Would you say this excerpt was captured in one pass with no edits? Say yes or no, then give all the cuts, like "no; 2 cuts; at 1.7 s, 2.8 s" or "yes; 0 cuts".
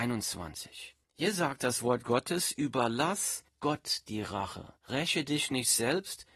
no; 3 cuts; at 1.0 s, 3.5 s, 4.8 s